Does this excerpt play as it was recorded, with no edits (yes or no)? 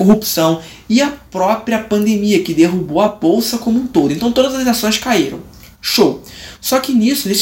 yes